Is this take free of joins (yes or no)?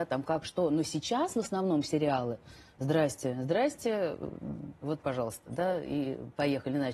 yes